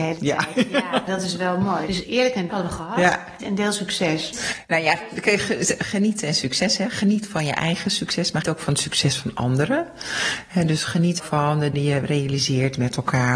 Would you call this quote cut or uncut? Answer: cut